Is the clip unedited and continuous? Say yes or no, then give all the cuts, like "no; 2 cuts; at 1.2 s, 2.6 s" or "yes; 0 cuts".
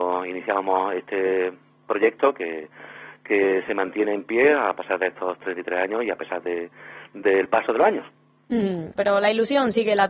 no; 1 cut; at 9.0 s